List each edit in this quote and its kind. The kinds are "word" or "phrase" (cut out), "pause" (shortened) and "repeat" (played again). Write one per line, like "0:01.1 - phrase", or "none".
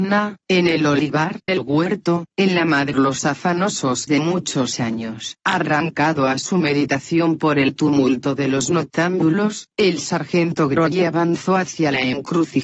0:01.5 - word
0:02.9 - phrase
0:04.1 - word
0:05.4 - pause